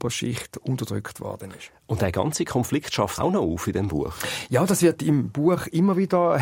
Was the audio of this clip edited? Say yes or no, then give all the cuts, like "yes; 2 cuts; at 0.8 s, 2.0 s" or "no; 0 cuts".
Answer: yes; 1 cut; at 3.2 s